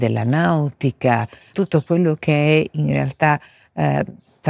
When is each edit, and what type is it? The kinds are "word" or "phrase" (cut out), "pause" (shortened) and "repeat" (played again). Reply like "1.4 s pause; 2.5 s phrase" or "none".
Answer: none